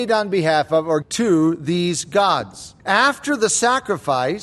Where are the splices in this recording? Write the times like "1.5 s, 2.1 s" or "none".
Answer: 1.0 s, 2.8 s